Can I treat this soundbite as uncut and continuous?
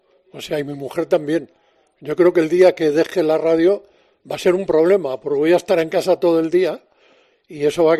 yes; 0 cuts

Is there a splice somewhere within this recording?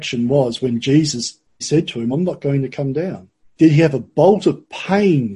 yes; 3 cuts; at 1.6 s, 2.1 s, 3.4 s

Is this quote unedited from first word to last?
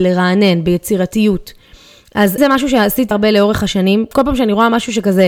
no; 2 cuts; at 2.4 s, 3.1 s

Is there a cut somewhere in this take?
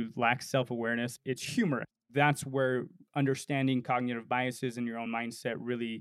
no; 0 cuts

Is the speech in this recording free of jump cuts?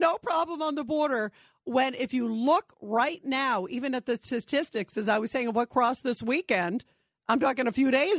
yes; 0 cuts

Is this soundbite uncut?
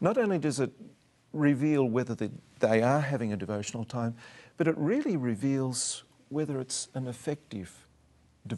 yes; 0 cuts

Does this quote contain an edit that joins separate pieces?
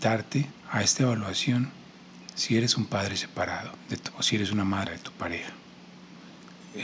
yes; 2 cuts; at 4.1 s, 4.9 s

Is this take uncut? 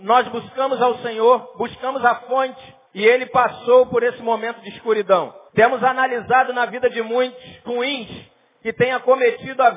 no; 3 cuts; at 2.8 s, 5.5 s, 7.6 s

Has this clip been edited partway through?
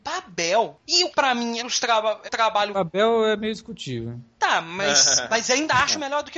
yes; 3 cuts; at 1.1 s, 1.6 s, 2.2 s

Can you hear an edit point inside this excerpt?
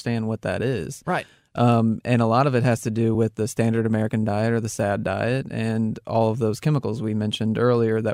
no; 0 cuts

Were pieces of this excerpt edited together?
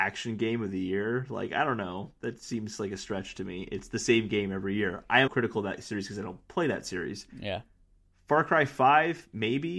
yes; 2 cuts; at 5.3 s, 7.3 s

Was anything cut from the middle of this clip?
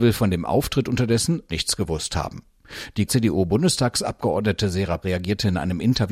yes; 3 cuts; at 1.5 s, 3.1 s, 5.0 s

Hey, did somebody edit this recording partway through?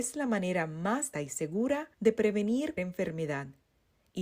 yes; 3 cuts; at 1.1 s, 1.9 s, 2.8 s

